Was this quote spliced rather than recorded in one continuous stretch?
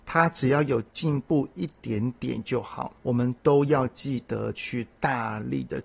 yes; 1 cut; at 3.0 s

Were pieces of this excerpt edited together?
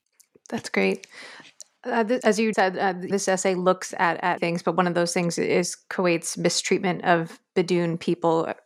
yes; 4 cuts; at 2.2 s, 2.5 s, 3.1 s, 4.4 s

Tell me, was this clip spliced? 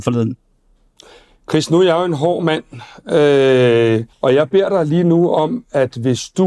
yes; 1 cut; at 4.1 s

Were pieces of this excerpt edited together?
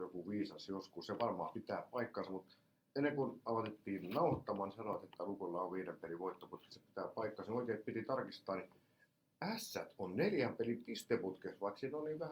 no; 0 cuts

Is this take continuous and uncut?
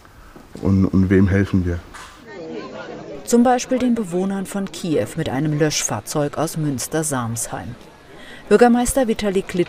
yes; 0 cuts

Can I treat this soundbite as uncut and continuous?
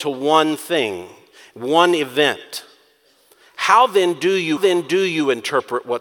no; 1 cut; at 4.6 s

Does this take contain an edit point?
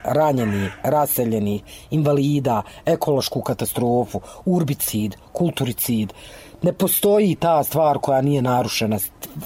no; 0 cuts

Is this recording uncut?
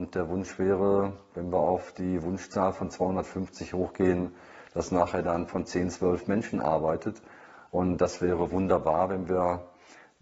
no; 1 cut; at 5.5 s

